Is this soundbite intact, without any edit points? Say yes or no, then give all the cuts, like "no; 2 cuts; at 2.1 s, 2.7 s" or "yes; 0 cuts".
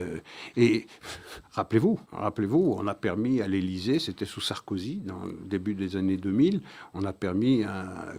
no; 1 cut; at 2.0 s